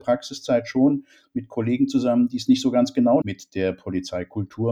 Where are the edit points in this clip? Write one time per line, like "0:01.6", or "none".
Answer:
0:03.2